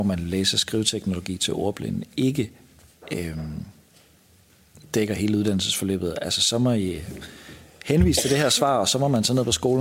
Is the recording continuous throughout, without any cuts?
yes; 0 cuts

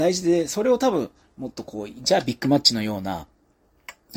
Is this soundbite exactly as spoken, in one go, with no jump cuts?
yes; 0 cuts

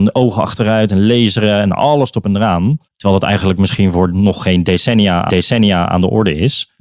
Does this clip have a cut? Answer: yes; 2 cuts; at 2.9 s, 5.3 s

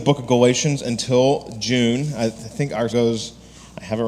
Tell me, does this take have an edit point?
yes; 1 cut; at 2.9 s

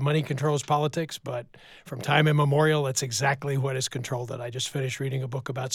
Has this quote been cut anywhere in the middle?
no; 0 cuts

